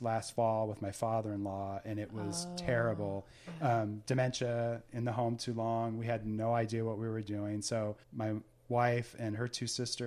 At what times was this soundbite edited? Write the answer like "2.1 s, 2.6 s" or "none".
8.0 s